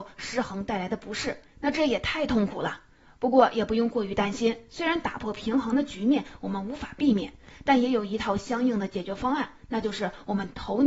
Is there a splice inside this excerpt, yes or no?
no